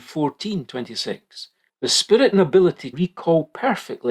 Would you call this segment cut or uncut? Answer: cut